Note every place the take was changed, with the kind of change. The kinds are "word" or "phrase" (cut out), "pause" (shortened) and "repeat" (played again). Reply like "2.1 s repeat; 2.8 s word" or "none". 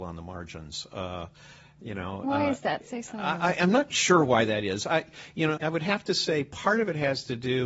2.2 s word; 3.9 s word; 5.6 s word